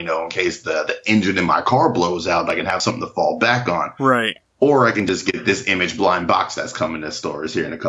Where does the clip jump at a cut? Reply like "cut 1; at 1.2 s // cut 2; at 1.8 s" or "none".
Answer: none